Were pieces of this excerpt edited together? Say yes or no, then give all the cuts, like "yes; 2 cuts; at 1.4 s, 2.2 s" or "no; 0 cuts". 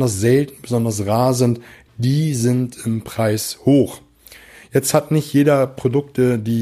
no; 0 cuts